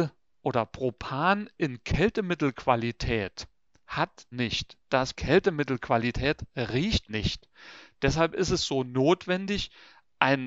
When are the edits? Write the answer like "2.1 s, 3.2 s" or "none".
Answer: 4.3 s, 5.1 s, 7.1 s